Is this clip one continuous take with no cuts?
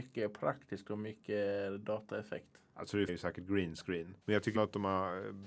no; 4 cuts; at 2.7 s, 3.1 s, 4.2 s, 4.5 s

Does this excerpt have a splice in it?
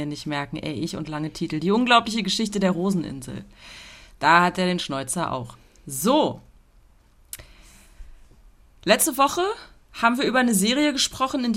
no; 0 cuts

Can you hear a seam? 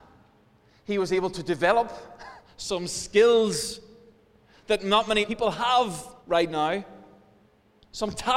yes; 2 cuts; at 5.2 s, 6.2 s

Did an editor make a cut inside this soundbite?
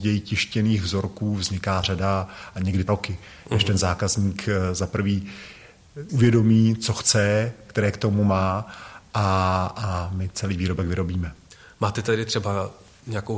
yes; 4 cuts; at 1.8 s, 2.9 s, 6.1 s, 7.7 s

